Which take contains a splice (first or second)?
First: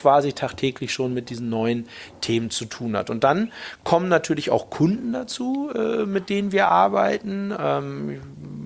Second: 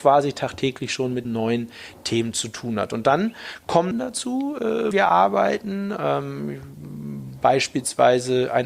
second